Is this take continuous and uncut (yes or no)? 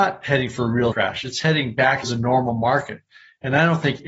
no